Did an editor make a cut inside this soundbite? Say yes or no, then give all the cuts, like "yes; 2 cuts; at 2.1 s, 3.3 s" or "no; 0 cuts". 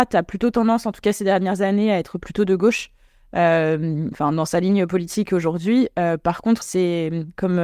yes; 1 cut; at 6.6 s